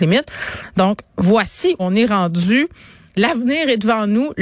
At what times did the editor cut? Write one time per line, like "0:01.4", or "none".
0:01.8